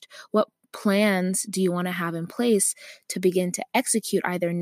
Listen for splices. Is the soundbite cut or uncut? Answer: uncut